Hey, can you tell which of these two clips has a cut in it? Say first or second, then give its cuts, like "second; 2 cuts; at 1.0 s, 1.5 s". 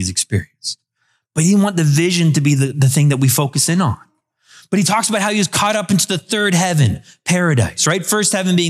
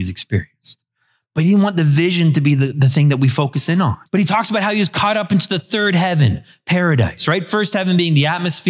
second; 1 cut; at 4.1 s